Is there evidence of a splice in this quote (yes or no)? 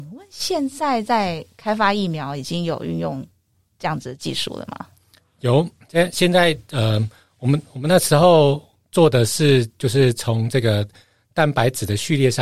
no